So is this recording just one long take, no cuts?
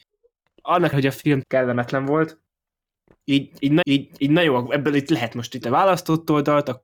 no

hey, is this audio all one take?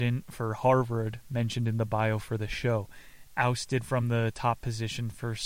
yes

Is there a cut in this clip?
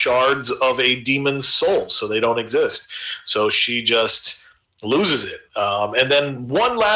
no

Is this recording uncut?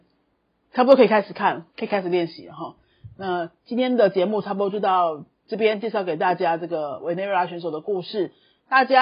yes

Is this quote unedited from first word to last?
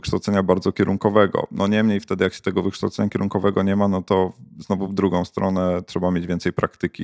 yes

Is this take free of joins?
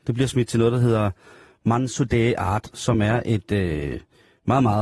yes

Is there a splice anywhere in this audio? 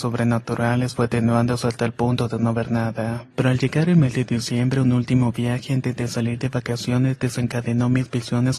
yes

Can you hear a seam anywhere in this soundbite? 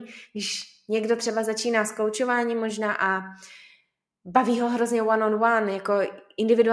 no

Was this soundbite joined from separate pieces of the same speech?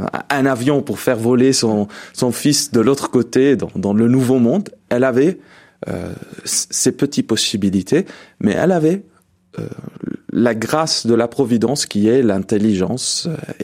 no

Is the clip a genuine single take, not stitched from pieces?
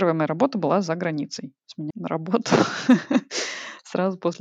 no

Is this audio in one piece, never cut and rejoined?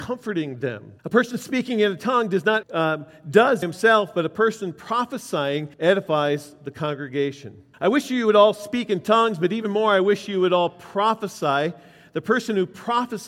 no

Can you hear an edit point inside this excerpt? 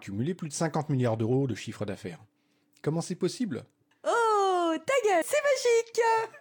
yes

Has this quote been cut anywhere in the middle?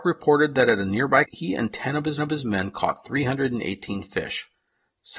yes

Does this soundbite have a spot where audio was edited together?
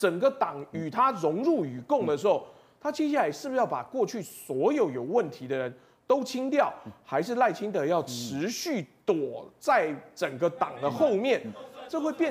no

